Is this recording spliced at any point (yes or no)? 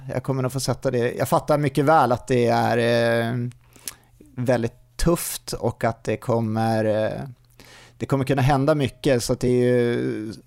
no